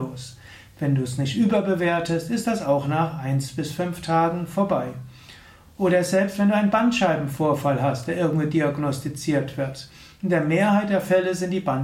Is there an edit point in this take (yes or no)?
no